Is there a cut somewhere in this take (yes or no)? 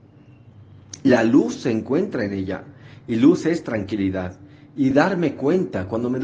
no